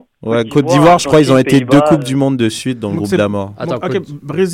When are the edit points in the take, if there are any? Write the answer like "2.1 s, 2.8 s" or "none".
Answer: none